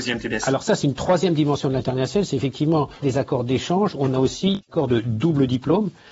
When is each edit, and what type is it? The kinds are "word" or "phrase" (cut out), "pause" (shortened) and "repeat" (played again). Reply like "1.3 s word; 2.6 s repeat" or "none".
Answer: 3.0 s word